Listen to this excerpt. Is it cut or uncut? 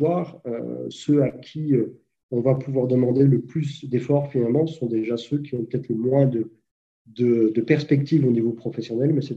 uncut